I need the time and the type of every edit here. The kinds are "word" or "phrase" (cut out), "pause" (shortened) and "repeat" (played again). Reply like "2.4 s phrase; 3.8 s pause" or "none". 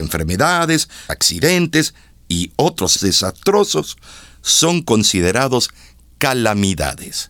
1.1 s word; 3.0 s word